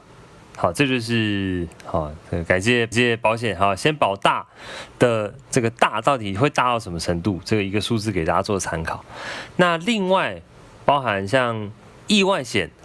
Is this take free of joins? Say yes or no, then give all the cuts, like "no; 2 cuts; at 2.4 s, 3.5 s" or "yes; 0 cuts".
no; 1 cut; at 2.9 s